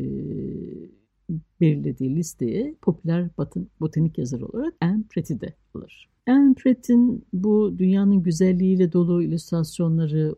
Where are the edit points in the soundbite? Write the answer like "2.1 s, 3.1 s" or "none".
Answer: 4.8 s, 6.2 s